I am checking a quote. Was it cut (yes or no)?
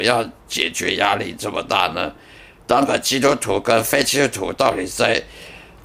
no